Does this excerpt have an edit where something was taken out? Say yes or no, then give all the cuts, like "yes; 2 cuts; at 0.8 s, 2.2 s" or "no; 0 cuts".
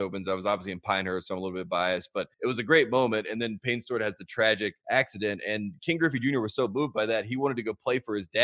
yes; 2 cuts; at 2.3 s, 4.8 s